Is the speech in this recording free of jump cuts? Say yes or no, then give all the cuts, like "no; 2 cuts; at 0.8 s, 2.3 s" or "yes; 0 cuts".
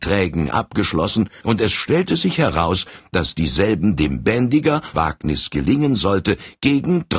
no; 1 cut; at 4.9 s